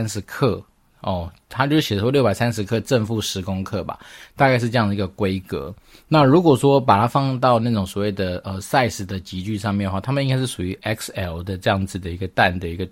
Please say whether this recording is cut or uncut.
uncut